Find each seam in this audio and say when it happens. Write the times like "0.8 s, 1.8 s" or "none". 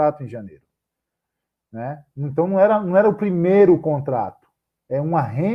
none